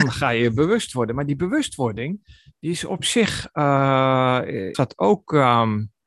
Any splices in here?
yes; 1 cut; at 4.7 s

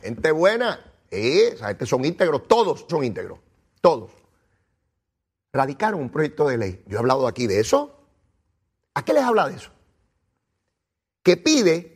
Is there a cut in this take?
yes; 2 cuts; at 2.9 s, 9.1 s

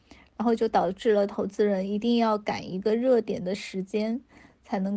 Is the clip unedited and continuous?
yes; 0 cuts

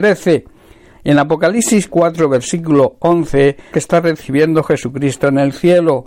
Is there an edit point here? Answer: yes; 2 cuts; at 1.9 s, 3.7 s

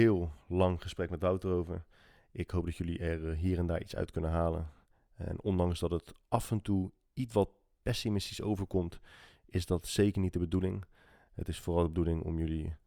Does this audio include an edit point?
no; 0 cuts

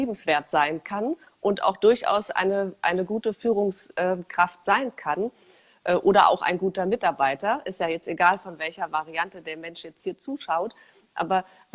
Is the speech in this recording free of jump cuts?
yes; 0 cuts

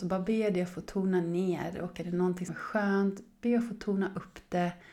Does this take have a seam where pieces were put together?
yes; 1 cut; at 2.5 s

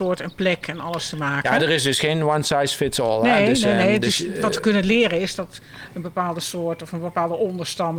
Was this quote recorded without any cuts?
yes; 0 cuts

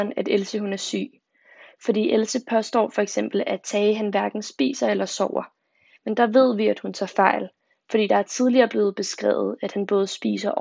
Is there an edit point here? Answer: no; 0 cuts

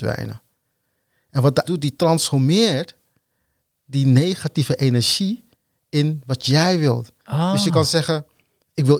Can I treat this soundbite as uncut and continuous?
no; 1 cut; at 1.6 s

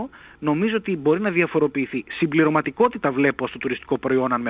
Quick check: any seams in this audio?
no; 0 cuts

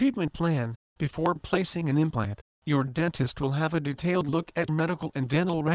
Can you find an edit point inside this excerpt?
yes; 1 cut; at 4.7 s

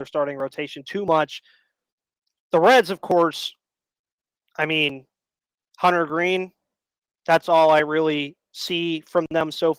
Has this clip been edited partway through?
no; 0 cuts

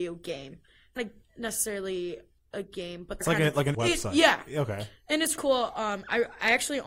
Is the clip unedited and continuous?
no; 5 cuts; at 1.0 s, 2.4 s, 3.2 s, 3.7 s, 5.4 s

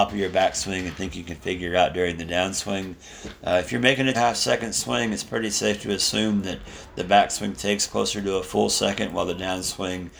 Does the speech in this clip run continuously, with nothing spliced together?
no; 1 cut; at 4.1 s

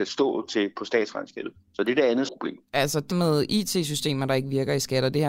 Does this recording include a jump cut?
yes; 2 cuts; at 2.3 s, 3.1 s

